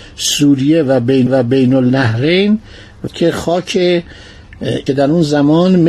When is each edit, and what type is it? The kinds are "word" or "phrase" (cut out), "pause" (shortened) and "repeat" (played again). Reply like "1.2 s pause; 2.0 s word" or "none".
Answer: 1.3 s repeat; 3.1 s phrase; 4.9 s phrase